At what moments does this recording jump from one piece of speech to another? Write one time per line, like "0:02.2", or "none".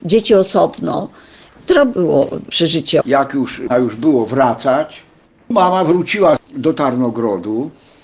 0:03.0
0:03.7
0:05.3